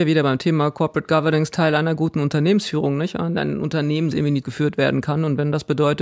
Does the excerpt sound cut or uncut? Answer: cut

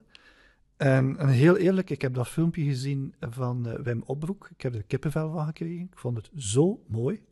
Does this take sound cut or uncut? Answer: uncut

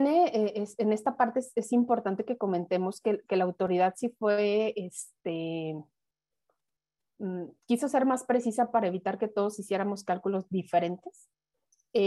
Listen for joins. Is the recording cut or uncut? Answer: uncut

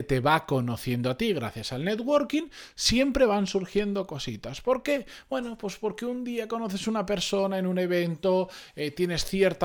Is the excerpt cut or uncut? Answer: uncut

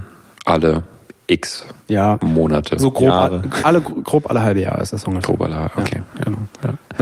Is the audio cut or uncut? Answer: cut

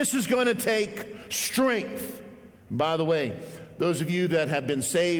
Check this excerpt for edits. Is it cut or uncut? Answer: cut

